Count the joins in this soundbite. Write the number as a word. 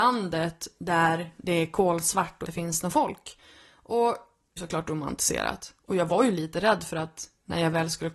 two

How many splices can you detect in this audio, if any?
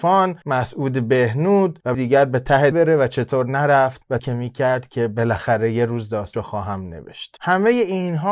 four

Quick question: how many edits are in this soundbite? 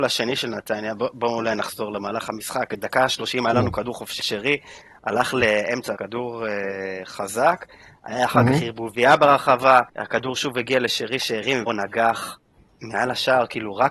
four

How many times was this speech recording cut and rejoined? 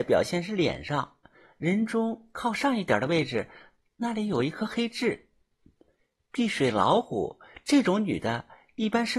zero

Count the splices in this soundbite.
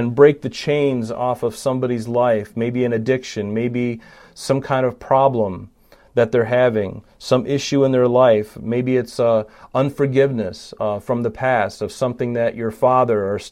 zero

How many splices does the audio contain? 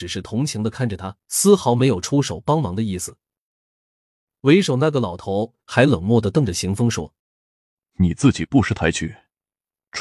two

